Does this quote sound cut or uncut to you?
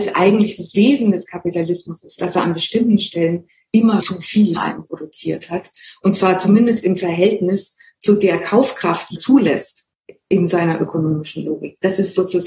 cut